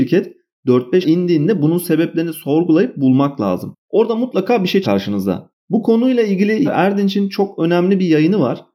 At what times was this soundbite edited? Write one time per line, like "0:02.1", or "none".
0:01.0
0:04.8
0:06.6